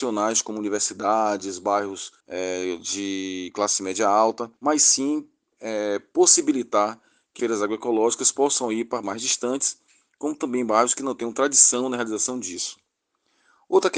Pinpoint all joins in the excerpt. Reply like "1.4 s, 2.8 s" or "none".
2.2 s, 4.6 s, 5.5 s, 7.4 s, 9.0 s